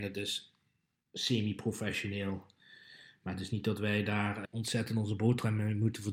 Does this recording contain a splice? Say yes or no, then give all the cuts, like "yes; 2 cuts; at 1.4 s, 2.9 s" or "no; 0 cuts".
yes; 1 cut; at 4.4 s